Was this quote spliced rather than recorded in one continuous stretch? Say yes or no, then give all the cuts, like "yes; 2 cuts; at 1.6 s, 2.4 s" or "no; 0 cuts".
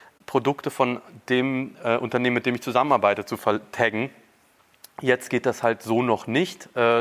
no; 0 cuts